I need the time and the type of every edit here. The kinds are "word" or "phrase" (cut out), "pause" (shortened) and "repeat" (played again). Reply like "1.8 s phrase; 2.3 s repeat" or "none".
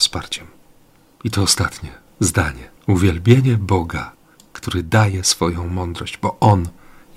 2.8 s pause; 4.3 s pause